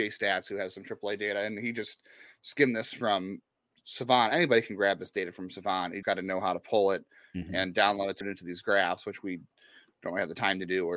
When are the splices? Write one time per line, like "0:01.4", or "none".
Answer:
0:06.0
0:08.2

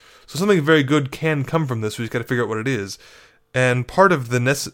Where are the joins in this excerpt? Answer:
none

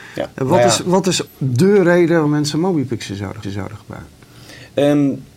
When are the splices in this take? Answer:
0:01.3
0:02.2
0:03.4

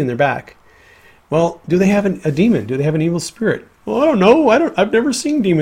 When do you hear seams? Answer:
none

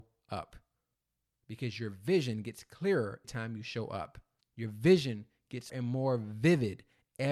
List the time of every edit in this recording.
0:00.9
0:03.2
0:04.4
0:05.7

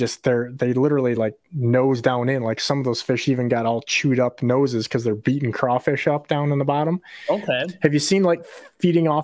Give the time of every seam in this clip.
none

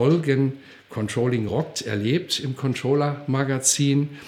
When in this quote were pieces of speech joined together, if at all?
none

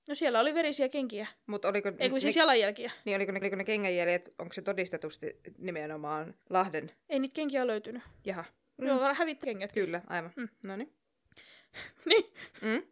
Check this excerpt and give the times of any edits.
0:03.4
0:06.4
0:09.4
0:11.9

